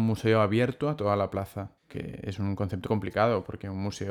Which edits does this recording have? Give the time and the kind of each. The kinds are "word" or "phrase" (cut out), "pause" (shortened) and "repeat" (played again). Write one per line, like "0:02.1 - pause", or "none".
0:01.8 - pause
0:02.8 - word